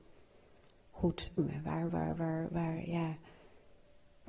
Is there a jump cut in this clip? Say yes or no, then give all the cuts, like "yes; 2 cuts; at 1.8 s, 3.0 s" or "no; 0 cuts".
yes; 2 cuts; at 1.4 s, 1.9 s